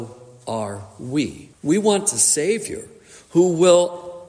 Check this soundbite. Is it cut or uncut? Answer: cut